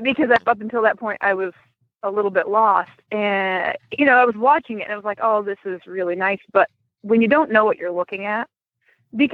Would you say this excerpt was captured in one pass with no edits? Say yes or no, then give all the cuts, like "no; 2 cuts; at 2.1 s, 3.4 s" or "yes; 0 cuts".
yes; 0 cuts